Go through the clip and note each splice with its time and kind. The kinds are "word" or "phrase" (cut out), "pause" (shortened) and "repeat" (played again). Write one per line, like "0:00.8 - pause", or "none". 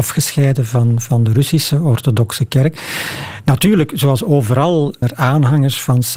0:05.0 - word

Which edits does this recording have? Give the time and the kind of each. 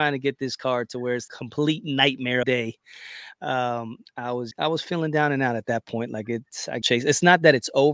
0:01.3 - word
0:02.4 - phrase
0:04.1 - word
0:04.5 - word
0:06.8 - phrase

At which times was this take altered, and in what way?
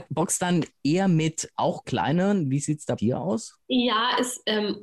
0:01.8 - word
0:03.0 - word
0:03.6 - pause

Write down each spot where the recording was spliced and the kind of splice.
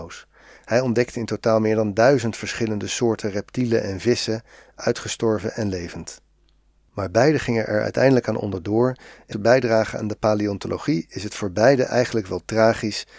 0:09.3 - phrase

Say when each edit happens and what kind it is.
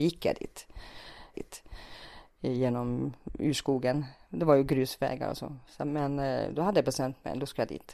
0:01.3 - repeat

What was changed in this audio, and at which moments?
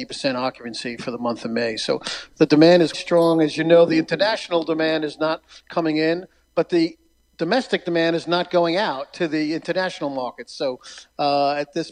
0:02.9 - word

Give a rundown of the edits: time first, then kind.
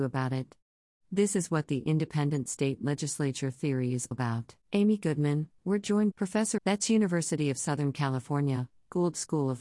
0:04.1 - word
0:04.6 - pause
0:05.6 - phrase
0:06.1 - phrase
0:06.6 - phrase

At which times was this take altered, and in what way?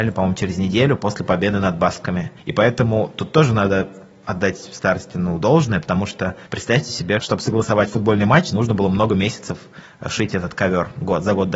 0:02.4 - pause
0:06.5 - pause

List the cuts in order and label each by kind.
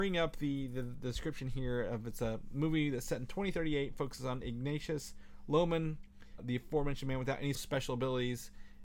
0:06.4 - word
0:07.5 - word

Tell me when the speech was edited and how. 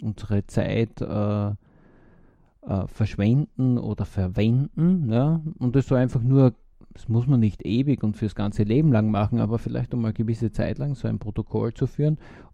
0:06.7 - pause

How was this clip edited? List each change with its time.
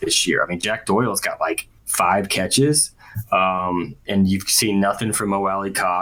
0:01.8 - pause
0:04.0 - word

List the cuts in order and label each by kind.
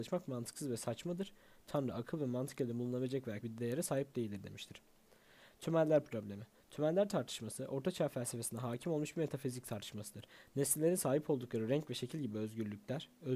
0:03.4 - word

